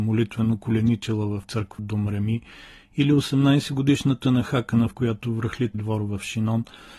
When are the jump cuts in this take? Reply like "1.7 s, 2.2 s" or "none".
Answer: 1.4 s, 1.8 s, 4.9 s, 5.7 s